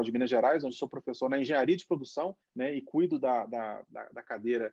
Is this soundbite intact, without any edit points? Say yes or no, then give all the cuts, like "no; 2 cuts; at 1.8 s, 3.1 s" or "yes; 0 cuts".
no; 1 cut; at 2.4 s